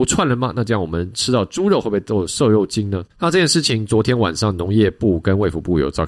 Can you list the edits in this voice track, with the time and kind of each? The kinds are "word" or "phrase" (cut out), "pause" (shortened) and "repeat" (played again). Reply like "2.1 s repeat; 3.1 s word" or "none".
3.1 s pause